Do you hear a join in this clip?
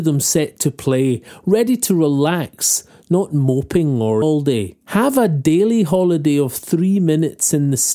yes; 2 cuts; at 4.2 s, 4.8 s

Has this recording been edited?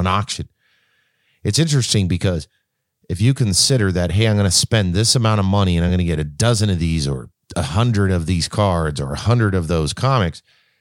no; 0 cuts

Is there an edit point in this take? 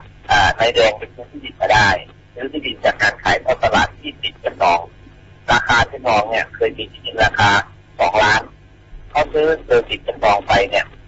no; 0 cuts

